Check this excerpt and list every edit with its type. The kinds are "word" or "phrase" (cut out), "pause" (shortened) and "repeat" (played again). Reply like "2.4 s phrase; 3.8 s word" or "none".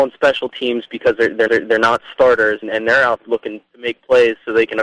1.5 s repeat; 2.6 s word; 3.2 s word; 3.7 s pause